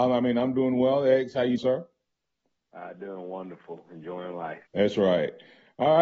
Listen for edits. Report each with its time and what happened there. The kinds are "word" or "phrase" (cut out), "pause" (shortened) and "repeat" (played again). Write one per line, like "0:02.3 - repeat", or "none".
0:01.6 - word
0:04.7 - pause

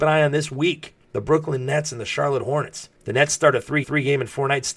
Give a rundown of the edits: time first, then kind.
0:01.0 - pause
0:02.9 - pause
0:03.8 - repeat

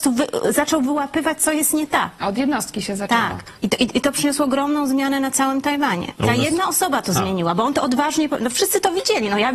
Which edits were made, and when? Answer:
0:03.6 - pause
0:06.2 - pause

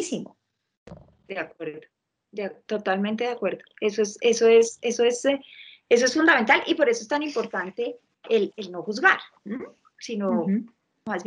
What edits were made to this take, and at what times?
0:09.4 - pause

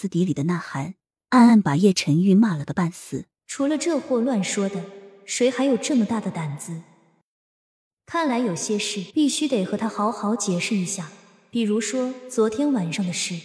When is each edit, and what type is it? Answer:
0:03.4 - pause
0:09.1 - pause

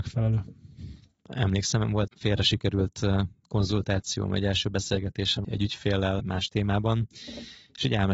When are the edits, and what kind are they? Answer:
0:02.1 - word
0:05.4 - word
0:06.2 - word

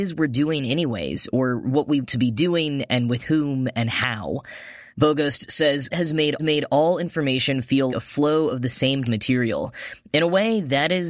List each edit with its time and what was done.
0:02.0 - word
0:04.9 - pause
0:05.9 - phrase
0:06.4 - repeat
0:07.9 - word
0:09.0 - phrase

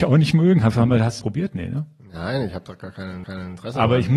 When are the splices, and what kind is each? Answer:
0:01.2 - phrase
0:03.2 - repeat

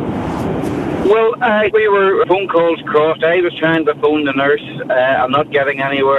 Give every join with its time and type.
0:01.7 - word
0:02.2 - word

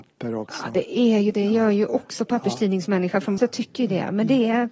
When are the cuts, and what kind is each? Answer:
0:03.4 - word

